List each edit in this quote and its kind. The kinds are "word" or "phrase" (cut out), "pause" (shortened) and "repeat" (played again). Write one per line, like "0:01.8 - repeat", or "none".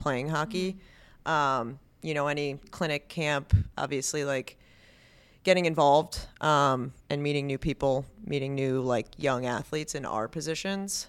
0:07.0 - pause